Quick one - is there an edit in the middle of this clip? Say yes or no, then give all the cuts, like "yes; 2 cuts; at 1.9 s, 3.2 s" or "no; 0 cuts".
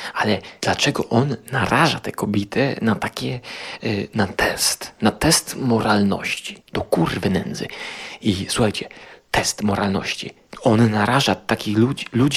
yes; 1 cut; at 6.6 s